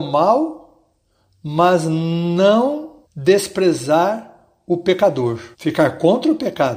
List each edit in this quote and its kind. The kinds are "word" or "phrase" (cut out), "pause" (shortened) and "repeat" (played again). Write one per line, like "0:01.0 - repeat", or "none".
0:03.0 - pause
0:05.5 - pause